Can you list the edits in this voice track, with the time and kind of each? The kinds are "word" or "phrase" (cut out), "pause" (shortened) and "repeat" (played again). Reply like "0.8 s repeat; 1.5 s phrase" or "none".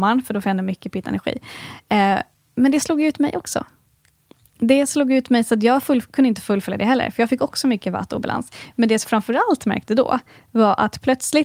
9.0 s word